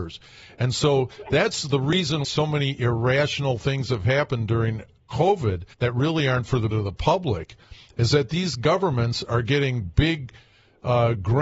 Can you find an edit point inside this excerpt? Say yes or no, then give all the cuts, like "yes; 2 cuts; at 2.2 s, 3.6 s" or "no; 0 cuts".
yes; 3 cuts; at 2.2 s, 5.7 s, 6.7 s